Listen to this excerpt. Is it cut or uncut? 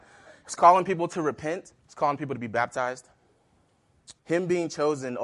cut